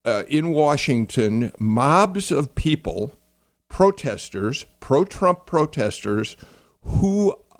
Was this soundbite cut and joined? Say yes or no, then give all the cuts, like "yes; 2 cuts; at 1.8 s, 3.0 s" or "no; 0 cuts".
no; 0 cuts